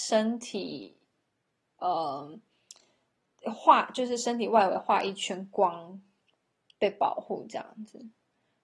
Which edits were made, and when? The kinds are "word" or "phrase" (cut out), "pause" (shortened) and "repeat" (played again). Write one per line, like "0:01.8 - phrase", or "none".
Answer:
none